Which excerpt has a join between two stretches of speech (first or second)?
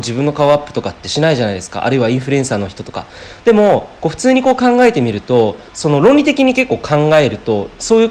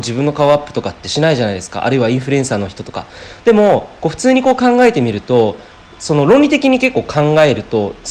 first